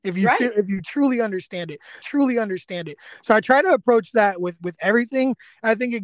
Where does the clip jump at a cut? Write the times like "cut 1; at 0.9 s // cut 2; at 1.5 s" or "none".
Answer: cut 1; at 2.0 s